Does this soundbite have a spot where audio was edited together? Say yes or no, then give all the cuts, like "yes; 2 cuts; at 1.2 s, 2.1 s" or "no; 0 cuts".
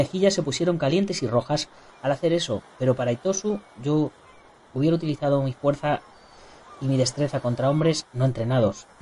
no; 0 cuts